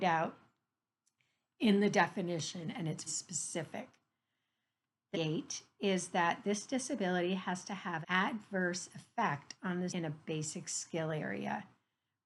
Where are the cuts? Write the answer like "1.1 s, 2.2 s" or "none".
3.1 s, 5.1 s, 8.0 s, 9.9 s